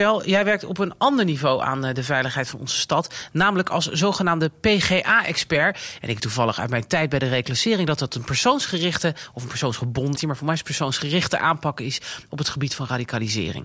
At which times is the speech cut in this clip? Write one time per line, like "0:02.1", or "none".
0:06.2
0:10.2